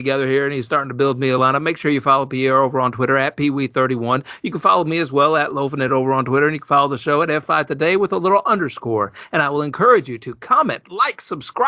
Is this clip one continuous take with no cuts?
yes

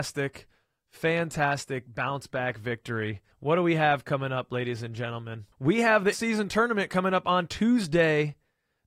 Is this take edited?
yes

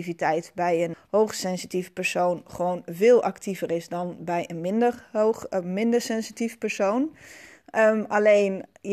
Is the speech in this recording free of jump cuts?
no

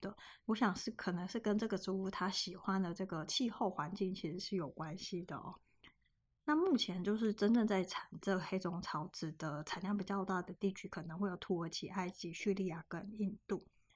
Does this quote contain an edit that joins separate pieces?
no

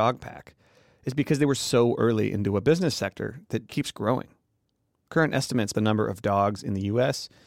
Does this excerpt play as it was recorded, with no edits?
no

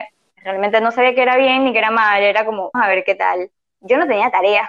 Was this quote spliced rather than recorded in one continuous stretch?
yes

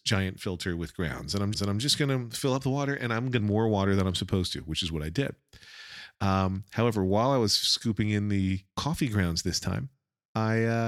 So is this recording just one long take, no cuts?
no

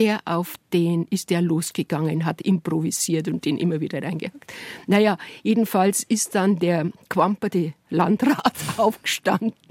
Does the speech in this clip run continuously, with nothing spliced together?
yes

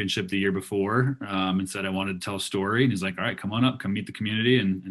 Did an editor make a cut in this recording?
no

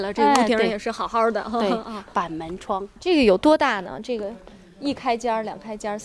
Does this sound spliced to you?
no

